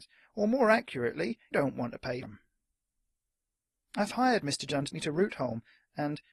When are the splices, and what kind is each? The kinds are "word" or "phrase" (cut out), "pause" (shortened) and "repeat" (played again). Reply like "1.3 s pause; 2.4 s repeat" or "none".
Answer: 1.5 s word; 2.2 s word; 4.9 s word